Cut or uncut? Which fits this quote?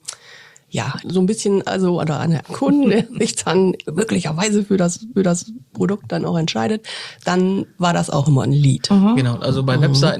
cut